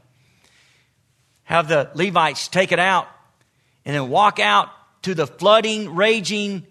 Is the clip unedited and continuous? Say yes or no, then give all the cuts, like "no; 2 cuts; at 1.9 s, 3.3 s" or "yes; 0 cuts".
yes; 0 cuts